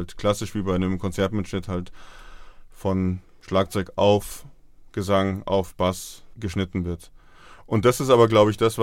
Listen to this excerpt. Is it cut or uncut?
uncut